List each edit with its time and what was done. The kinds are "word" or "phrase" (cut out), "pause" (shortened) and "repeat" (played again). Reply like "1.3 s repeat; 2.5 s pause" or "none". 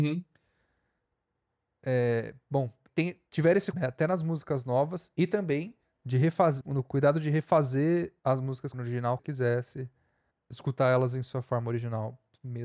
2.9 s word; 3.3 s pause; 3.7 s word; 5.8 s pause; 6.6 s word; 8.2 s pause; 8.7 s phrase; 9.2 s phrase; 10.3 s pause